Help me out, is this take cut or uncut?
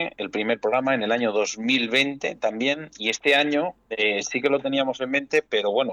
cut